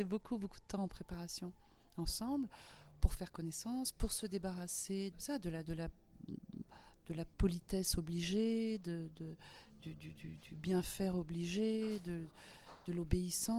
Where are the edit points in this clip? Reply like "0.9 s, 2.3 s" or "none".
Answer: 5.1 s, 7.3 s